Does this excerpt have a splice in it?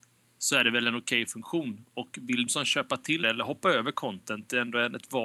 yes; 2 cuts; at 2.5 s, 3.2 s

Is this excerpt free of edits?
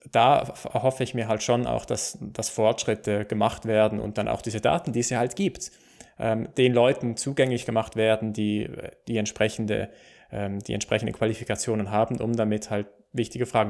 yes; 0 cuts

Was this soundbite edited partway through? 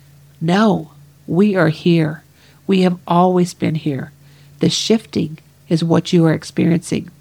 no; 0 cuts

